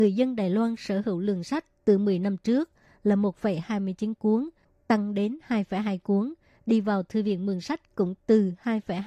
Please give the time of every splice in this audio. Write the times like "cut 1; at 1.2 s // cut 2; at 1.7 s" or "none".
none